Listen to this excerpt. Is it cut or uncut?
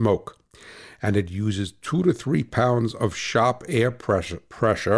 uncut